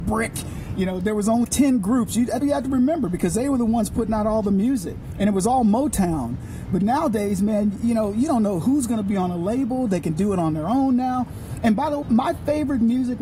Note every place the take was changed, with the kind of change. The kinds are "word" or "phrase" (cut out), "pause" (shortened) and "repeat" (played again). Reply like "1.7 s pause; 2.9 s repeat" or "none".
1.4 s word; 2.4 s word; 12.0 s word